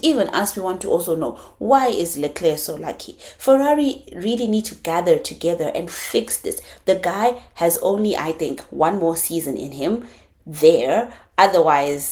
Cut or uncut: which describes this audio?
uncut